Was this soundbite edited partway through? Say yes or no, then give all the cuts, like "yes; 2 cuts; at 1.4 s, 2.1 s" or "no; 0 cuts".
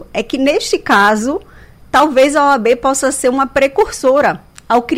no; 0 cuts